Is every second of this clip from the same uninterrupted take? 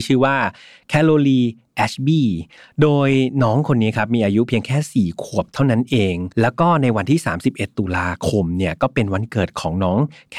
no; 1 cut; at 6.3 s

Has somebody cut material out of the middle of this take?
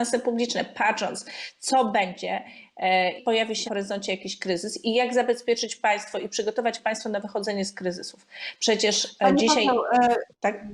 yes; 2 cuts; at 3.2 s, 3.7 s

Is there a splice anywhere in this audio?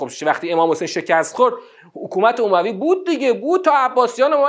no; 0 cuts

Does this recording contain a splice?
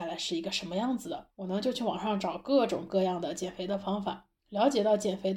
yes; 1 cut; at 1.3 s

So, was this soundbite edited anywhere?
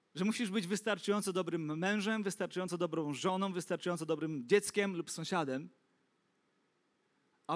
no; 0 cuts

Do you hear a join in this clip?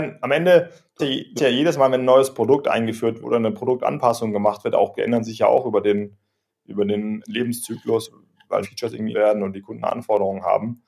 yes; 8 cuts; at 1.0 s, 1.4 s, 3.2 s, 4.9 s, 7.2 s, 8.6 s, 9.1 s, 9.8 s

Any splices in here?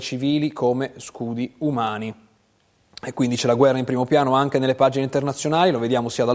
no; 0 cuts

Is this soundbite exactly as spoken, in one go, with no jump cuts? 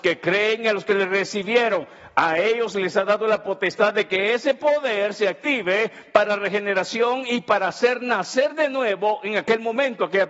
yes; 0 cuts

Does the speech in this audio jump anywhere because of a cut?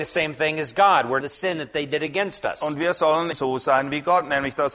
yes; 2 cuts; at 1.2 s, 3.3 s

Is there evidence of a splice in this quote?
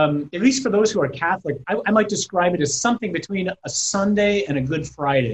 no; 0 cuts

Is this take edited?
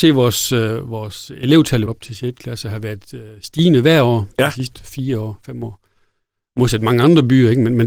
yes; 1 cut; at 1.9 s

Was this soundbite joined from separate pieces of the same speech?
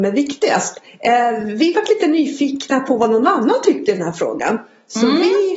no; 0 cuts

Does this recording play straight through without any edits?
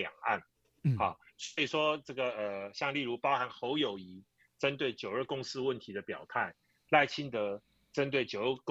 yes; 0 cuts

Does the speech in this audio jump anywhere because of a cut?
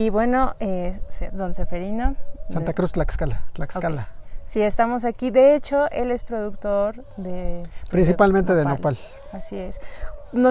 no; 0 cuts

